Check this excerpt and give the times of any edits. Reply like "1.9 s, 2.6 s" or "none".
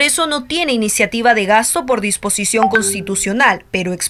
none